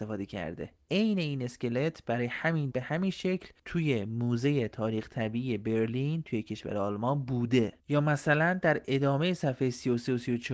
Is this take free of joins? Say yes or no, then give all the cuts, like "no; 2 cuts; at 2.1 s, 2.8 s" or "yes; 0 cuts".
no; 2 cuts; at 2.7 s, 7.8 s